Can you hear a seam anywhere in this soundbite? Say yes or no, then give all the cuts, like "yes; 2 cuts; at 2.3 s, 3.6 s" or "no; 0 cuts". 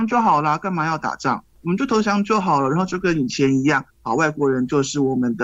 yes; 1 cut; at 3.9 s